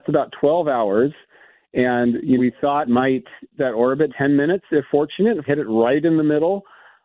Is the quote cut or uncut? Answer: cut